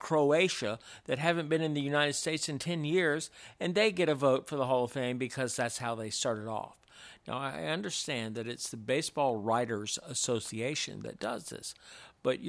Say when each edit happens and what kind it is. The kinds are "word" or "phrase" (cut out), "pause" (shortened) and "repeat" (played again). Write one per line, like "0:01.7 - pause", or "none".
none